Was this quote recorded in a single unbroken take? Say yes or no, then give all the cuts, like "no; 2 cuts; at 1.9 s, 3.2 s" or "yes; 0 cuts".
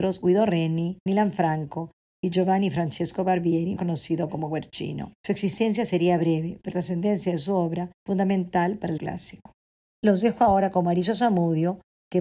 no; 6 cuts; at 1.1 s, 3.8 s, 5.2 s, 6.7 s, 7.9 s, 9.0 s